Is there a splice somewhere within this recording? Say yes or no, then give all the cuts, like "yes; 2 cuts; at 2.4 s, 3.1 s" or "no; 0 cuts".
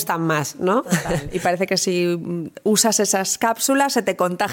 no; 0 cuts